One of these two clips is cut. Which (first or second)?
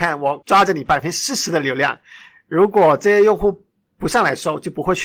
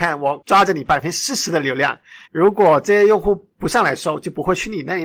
second